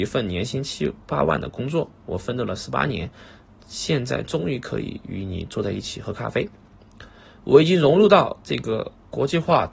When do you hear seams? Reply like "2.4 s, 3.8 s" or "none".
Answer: none